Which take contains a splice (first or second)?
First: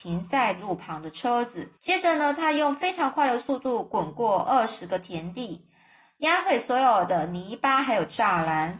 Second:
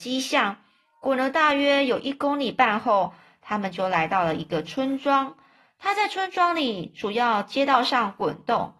first